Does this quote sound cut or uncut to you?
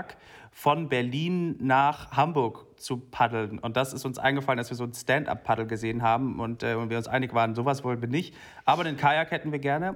uncut